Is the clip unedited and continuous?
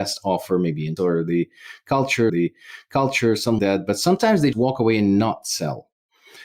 no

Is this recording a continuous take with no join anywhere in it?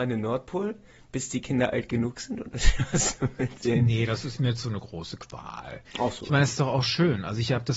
no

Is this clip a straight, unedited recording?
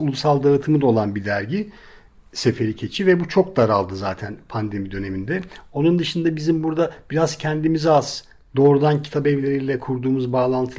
yes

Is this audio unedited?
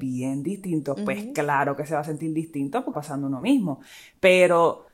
no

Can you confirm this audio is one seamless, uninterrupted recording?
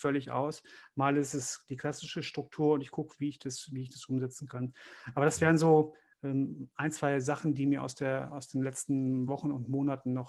yes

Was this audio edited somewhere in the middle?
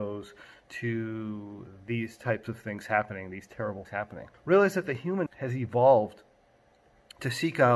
yes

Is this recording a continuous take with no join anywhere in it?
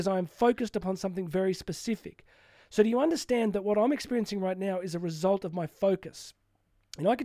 yes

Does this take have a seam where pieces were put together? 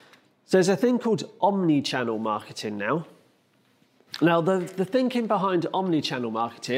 no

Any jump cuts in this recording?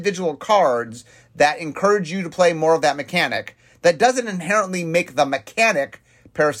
no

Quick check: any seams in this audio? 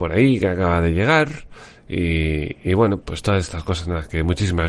yes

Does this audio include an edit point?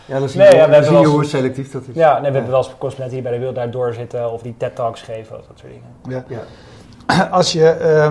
no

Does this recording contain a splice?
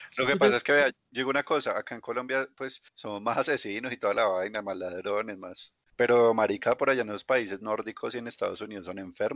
yes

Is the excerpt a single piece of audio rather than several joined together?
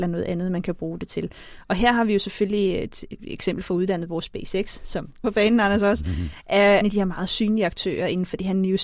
no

